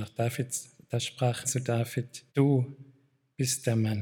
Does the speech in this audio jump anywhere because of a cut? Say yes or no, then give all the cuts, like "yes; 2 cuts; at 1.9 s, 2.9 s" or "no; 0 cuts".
yes; 2 cuts; at 1.4 s, 2.3 s